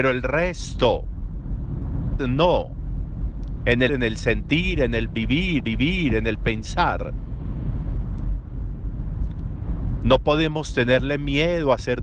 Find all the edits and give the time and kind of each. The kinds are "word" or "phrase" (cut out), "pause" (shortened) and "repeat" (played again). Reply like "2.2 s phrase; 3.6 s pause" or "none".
2.2 s word; 3.9 s word; 5.6 s repeat